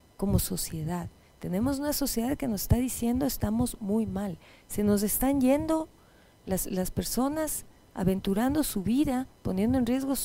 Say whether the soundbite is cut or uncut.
uncut